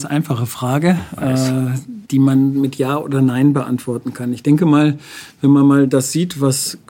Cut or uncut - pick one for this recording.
cut